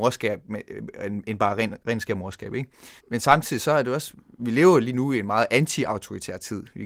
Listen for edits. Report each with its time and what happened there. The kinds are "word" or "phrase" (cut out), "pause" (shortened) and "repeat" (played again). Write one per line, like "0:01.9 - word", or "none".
0:03.0 - pause